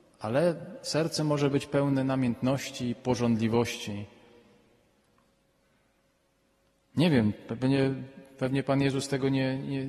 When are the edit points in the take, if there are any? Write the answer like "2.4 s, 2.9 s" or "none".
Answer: none